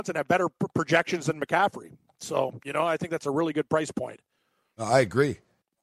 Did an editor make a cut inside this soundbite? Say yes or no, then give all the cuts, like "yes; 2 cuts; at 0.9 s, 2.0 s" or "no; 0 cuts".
no; 0 cuts